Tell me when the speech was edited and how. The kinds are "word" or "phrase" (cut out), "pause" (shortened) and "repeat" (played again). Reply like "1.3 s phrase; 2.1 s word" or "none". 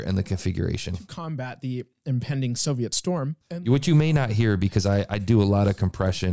3.4 s pause